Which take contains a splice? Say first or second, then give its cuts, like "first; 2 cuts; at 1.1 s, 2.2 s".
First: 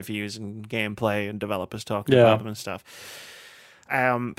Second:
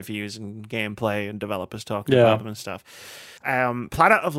second; 1 cut; at 3.4 s